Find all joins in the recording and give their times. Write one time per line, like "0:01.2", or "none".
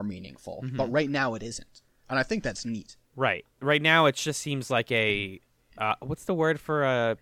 0:03.0